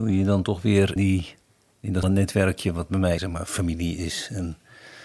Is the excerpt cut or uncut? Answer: cut